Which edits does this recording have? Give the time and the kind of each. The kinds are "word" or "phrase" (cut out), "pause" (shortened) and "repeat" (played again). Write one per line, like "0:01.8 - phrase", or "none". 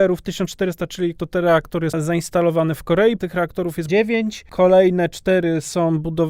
0:01.2 - word
0:01.9 - word
0:03.2 - word
0:03.9 - word